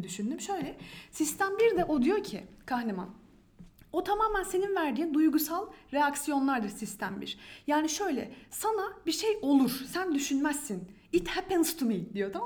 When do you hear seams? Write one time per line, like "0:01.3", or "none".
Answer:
none